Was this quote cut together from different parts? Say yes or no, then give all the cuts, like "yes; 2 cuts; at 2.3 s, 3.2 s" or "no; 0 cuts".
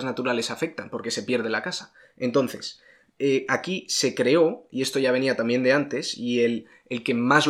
no; 0 cuts